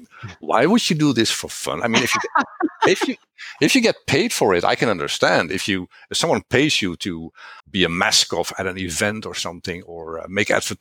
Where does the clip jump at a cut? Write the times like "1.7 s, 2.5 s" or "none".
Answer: 7.6 s